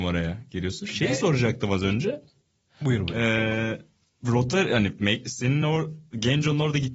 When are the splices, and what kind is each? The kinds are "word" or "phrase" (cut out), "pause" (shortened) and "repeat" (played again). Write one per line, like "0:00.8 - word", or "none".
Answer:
none